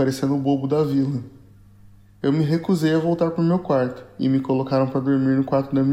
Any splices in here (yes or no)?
no